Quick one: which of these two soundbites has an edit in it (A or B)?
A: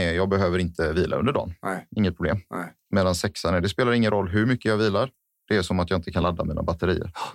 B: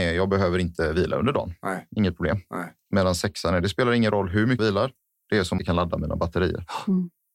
B